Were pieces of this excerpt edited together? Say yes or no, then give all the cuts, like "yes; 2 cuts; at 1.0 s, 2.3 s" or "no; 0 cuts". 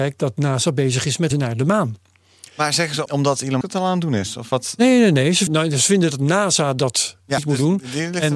yes; 5 cuts; at 1.3 s, 3.1 s, 3.6 s, 5.5 s, 7.4 s